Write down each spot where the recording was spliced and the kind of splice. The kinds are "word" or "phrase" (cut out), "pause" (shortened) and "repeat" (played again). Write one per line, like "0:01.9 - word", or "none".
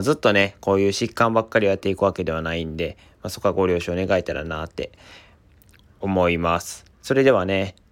0:06.9 - pause